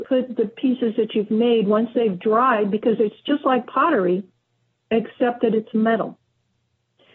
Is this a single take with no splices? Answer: yes; 0 cuts

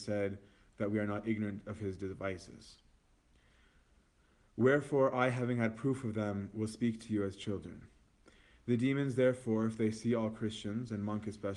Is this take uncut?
yes; 0 cuts

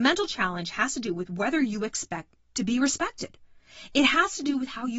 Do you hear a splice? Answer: no; 0 cuts

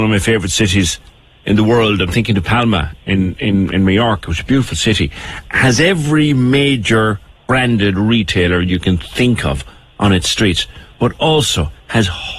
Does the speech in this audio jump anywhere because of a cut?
no; 0 cuts

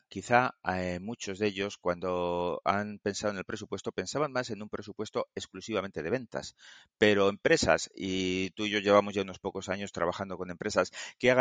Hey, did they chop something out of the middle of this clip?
no; 0 cuts

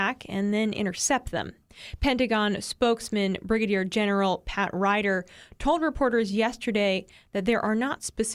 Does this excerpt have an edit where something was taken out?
no; 0 cuts

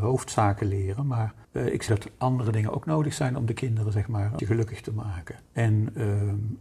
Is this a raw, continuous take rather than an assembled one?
no; 4 cuts; at 1.4 s, 1.9 s, 4.4 s, 5.4 s

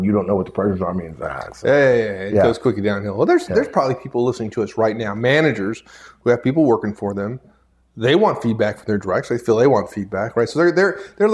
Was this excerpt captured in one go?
yes; 0 cuts

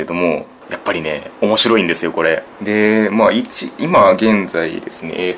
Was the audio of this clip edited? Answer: yes; 1 cut; at 1.3 s

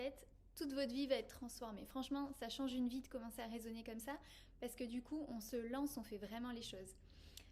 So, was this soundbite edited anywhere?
no; 0 cuts

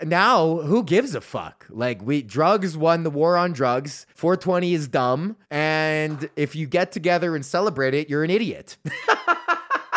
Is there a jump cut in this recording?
yes; 2 cuts; at 4.1 s, 5.4 s

